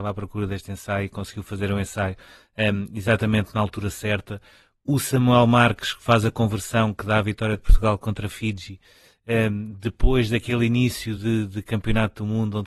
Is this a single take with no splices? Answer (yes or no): yes